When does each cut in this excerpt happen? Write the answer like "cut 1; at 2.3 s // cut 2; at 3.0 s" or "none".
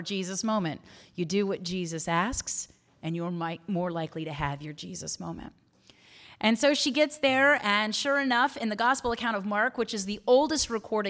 none